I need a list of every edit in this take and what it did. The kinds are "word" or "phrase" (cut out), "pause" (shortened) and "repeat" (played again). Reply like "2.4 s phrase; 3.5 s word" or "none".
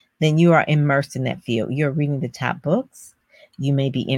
none